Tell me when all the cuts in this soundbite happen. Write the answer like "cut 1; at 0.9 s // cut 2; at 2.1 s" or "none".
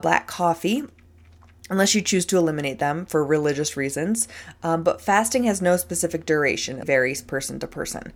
cut 1; at 6.8 s